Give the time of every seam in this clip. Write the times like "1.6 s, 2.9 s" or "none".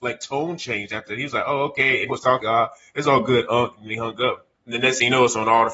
2.1 s, 2.4 s, 4.5 s